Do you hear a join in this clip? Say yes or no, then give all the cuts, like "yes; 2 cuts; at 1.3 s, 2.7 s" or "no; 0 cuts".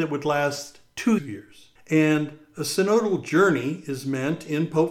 yes; 2 cuts; at 1.2 s, 1.8 s